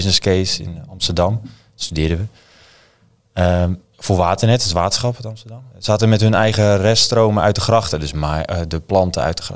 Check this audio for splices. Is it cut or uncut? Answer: cut